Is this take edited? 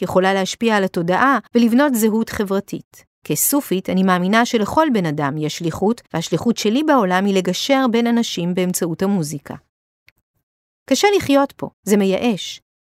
yes; 4 cuts; at 1.5 s, 3.2 s, 6.1 s, 11.7 s

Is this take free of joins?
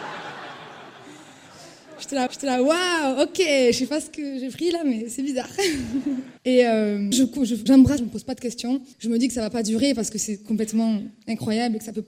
no; 6 cuts; at 2.3 s, 6.4 s, 7.1 s, 7.7 s, 8.0 s, 8.9 s

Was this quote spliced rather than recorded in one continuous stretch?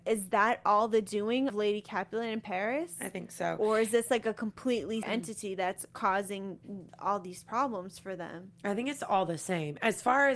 yes; 2 cuts; at 1.5 s, 5.0 s

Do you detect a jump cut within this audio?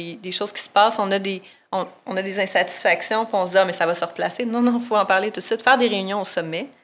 no; 0 cuts

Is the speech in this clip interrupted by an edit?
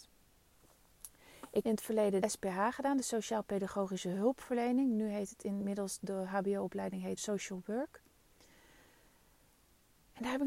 yes; 4 cuts; at 1.6 s, 2.2 s, 6.0 s, 7.2 s

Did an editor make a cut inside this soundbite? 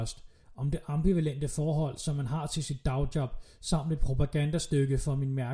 no; 0 cuts

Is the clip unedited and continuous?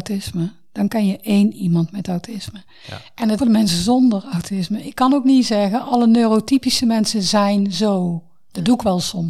no; 1 cut; at 3.4 s

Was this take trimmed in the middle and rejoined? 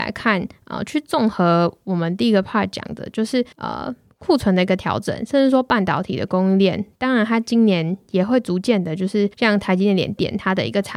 yes; 2 cuts; at 3.5 s, 9.3 s

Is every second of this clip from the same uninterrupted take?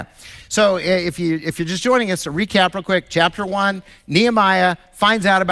yes; 0 cuts

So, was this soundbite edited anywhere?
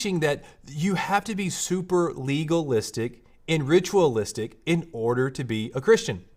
no; 0 cuts

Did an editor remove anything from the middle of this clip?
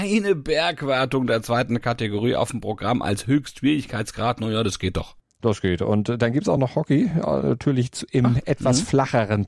no; 0 cuts

